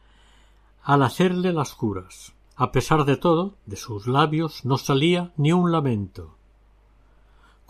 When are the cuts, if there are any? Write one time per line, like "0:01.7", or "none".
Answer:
0:02.5
0:03.6